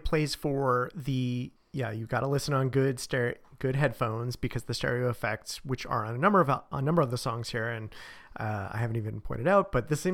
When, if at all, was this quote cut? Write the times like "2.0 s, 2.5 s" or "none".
1.6 s